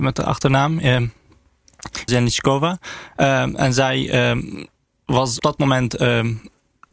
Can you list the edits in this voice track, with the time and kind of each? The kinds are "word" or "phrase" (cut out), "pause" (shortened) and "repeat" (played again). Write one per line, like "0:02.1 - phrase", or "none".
0:02.1 - word
0:05.4 - word